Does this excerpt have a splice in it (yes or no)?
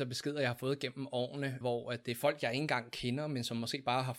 yes